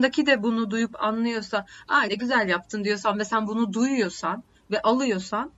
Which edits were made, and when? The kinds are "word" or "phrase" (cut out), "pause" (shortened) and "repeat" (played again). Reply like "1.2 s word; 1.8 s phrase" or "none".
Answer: 2.1 s word